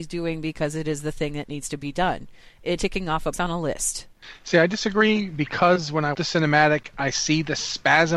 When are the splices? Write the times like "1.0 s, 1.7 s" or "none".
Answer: 2.8 s, 3.3 s, 6.1 s